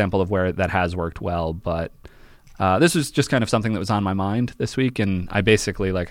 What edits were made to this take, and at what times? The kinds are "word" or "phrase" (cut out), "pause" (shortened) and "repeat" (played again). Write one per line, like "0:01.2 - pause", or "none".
none